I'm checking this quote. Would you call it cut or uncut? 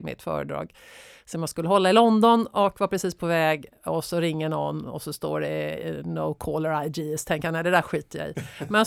uncut